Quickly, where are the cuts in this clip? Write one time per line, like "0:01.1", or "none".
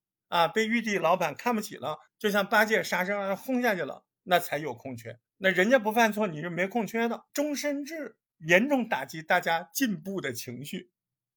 0:02.1
0:05.3
0:07.3